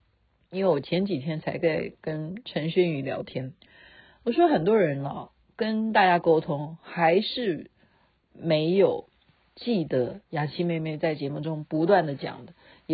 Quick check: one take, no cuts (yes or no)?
no